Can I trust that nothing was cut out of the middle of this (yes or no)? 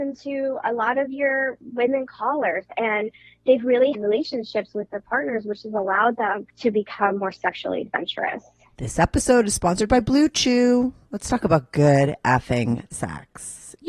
no